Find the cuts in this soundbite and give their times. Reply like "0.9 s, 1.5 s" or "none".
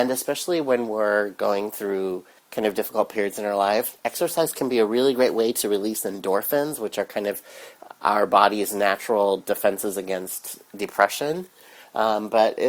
2.4 s, 4.0 s